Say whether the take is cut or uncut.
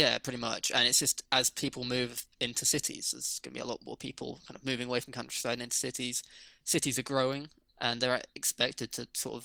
uncut